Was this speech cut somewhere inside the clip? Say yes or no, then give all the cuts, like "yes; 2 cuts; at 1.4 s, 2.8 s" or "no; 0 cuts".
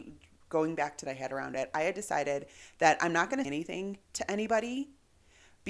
yes; 2 cuts; at 1.1 s, 3.4 s